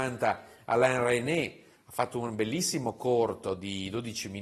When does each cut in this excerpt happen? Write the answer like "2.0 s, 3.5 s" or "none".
none